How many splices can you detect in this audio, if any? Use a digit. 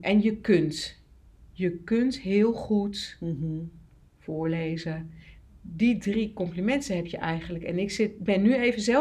0